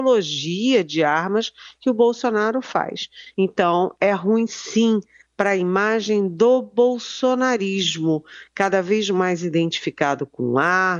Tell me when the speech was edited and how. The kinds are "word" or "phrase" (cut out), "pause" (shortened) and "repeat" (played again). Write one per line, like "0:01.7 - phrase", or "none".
none